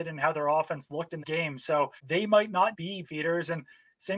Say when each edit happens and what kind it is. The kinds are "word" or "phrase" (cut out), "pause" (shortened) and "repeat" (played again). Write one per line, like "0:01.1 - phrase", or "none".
0:01.2 - word
0:02.0 - pause
0:02.7 - word
0:03.0 - word